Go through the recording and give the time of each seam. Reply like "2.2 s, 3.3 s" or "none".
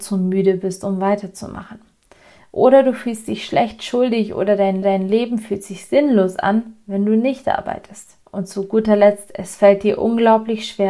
4.8 s, 8.2 s